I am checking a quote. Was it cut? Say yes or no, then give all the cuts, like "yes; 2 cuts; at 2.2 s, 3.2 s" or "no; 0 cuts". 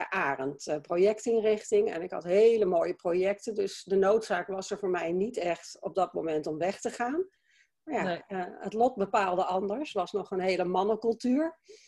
no; 0 cuts